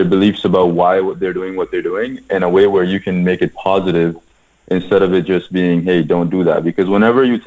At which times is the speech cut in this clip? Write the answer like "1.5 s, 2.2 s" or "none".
none